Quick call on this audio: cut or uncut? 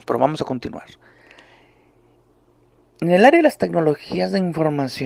uncut